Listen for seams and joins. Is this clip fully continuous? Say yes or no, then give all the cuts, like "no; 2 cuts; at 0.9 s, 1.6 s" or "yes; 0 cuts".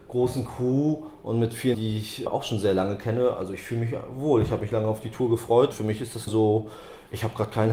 no; 4 cuts; at 1.7 s, 2.3 s, 5.7 s, 6.3 s